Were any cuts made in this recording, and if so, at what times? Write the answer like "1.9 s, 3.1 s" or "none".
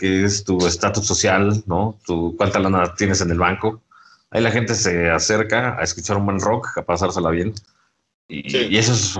none